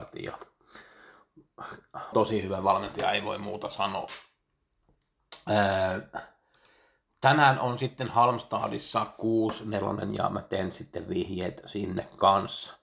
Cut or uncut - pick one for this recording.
cut